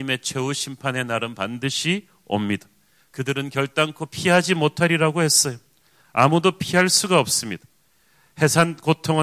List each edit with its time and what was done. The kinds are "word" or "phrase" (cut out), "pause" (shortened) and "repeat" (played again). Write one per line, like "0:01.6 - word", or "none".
none